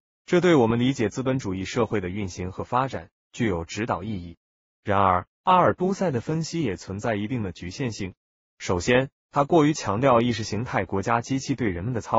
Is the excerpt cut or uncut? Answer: uncut